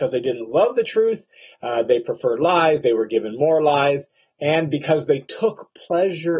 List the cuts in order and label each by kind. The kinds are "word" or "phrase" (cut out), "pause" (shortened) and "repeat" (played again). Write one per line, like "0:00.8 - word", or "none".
none